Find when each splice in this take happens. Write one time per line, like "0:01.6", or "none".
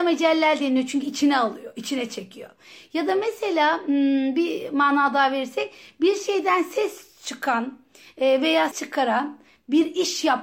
0:08.7